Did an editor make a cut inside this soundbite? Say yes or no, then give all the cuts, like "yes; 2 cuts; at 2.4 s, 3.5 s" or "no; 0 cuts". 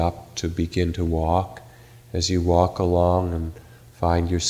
no; 0 cuts